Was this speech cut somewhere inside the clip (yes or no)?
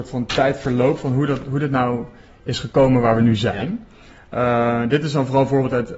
no